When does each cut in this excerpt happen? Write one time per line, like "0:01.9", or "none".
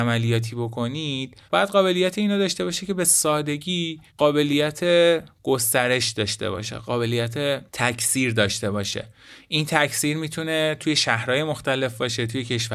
0:01.5
0:04.1
0:07.7